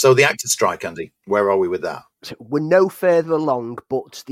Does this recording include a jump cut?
no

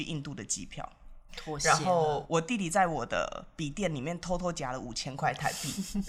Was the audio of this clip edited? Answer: yes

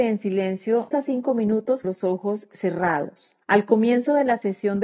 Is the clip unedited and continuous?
no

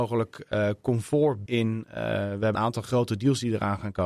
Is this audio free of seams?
no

